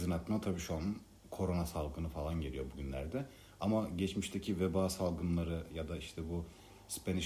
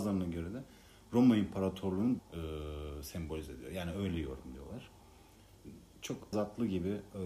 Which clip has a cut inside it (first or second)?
second